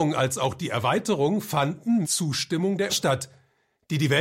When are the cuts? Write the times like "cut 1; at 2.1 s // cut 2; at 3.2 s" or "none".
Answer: cut 1; at 2.0 s // cut 2; at 2.9 s